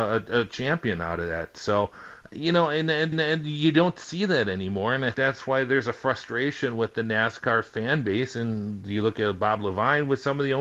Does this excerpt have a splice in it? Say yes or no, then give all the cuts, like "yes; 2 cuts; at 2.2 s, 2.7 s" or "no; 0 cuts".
yes; 2 cuts; at 3.1 s, 5.1 s